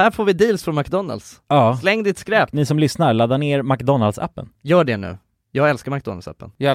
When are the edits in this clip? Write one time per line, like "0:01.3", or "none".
none